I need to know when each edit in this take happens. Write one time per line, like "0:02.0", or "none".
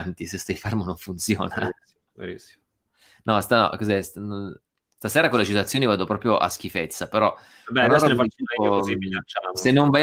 none